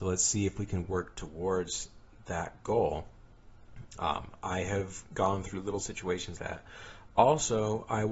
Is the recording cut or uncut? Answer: cut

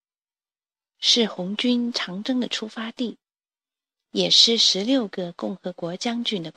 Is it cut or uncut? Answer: uncut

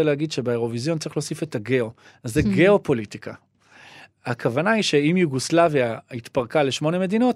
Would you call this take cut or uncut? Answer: uncut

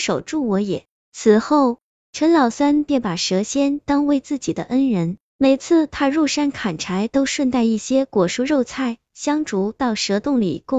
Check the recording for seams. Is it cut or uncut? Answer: uncut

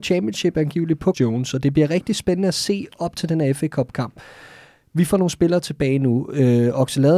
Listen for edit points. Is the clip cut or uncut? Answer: cut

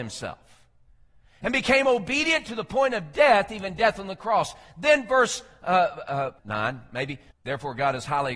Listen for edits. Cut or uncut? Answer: uncut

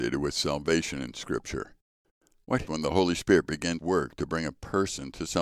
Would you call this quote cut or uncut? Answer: cut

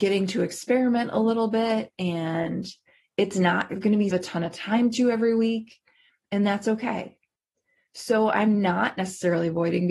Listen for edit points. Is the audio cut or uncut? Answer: cut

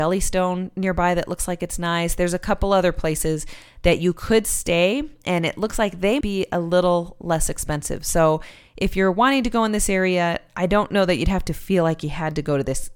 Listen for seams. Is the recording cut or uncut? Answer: cut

